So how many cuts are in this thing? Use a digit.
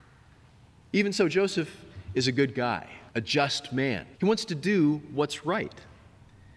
2